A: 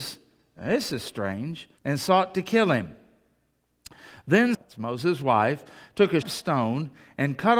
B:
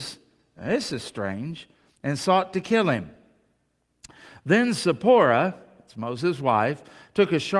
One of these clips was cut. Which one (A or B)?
A